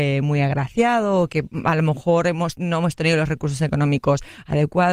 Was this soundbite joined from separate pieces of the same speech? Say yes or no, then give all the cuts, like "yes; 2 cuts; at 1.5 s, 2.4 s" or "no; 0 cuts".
no; 0 cuts